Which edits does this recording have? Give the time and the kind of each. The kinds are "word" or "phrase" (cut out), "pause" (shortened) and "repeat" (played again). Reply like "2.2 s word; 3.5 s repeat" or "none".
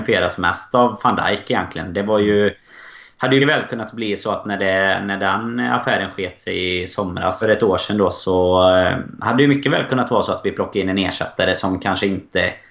3.4 s word; 7.4 s phrase